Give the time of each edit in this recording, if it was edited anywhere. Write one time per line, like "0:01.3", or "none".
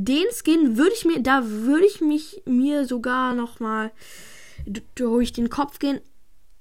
none

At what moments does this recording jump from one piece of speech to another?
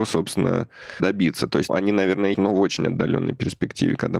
0:01.0
0:01.7
0:02.3

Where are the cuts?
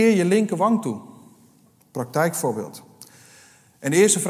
none

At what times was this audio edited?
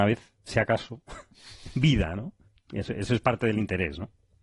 0:02.4

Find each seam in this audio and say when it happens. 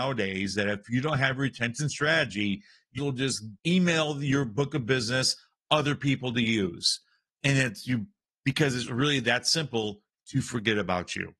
0:03.0
0:03.6

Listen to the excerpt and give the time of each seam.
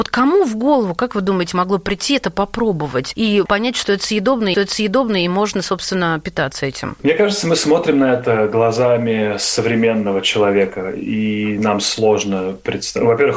0:04.5

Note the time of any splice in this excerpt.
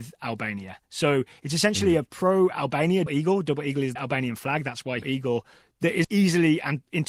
0:03.1
0:04.0
0:05.0
0:06.0

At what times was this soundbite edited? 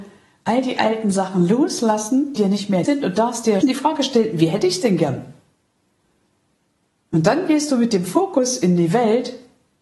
0:02.4
0:02.8
0:03.6

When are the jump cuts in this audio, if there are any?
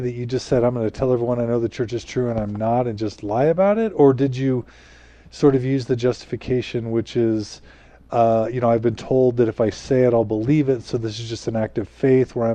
none

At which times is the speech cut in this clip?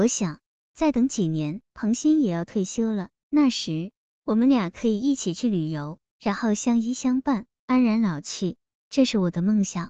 0:01.7

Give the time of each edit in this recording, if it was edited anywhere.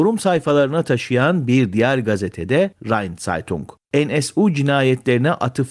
none

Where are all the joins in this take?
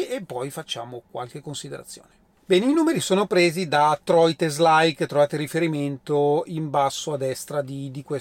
none

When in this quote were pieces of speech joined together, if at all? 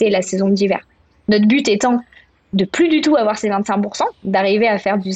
none

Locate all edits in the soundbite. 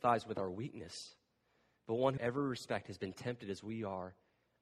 0:02.2

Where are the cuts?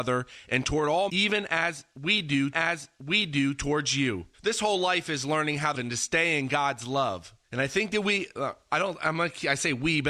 0:01.1
0:02.5
0:04.3
0:05.7
0:07.4

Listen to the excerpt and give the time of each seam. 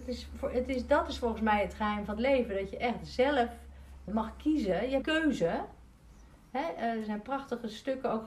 0:04.1
0:05.0

